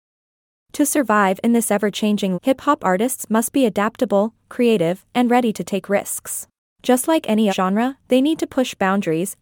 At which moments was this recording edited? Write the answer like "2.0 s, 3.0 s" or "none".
2.3 s, 6.6 s, 7.5 s